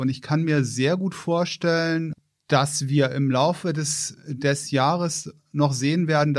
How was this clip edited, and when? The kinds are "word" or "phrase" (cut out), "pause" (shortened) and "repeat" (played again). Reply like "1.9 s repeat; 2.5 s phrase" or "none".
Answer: none

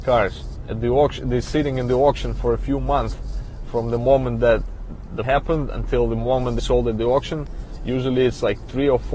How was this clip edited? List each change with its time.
5.2 s word; 6.6 s word

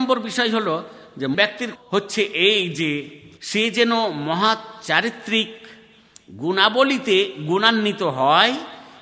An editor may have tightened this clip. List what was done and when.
1.3 s word; 1.8 s word; 3.4 s pause

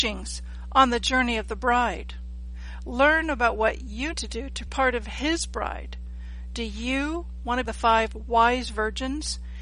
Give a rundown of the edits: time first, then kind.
4.1 s word; 4.7 s phrase; 7.6 s phrase

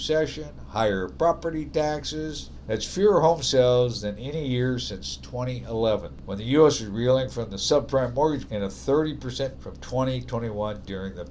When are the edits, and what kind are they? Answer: 8.5 s word; 9.5 s word

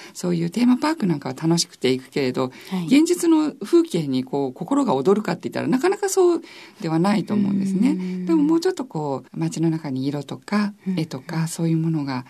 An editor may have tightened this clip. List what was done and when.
9.3 s pause

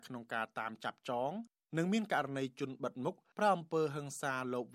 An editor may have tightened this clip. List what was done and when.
none

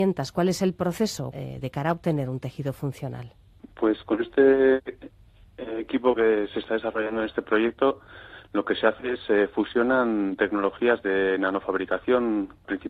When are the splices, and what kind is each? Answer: none

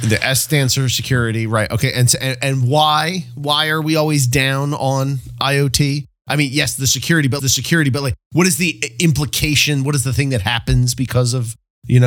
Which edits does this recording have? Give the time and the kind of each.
7.4 s repeat

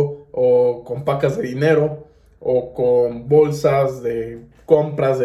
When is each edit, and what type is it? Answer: none

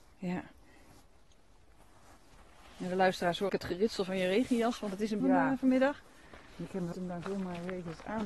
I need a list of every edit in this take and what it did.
3.5 s word; 5.2 s phrase; 6.9 s word

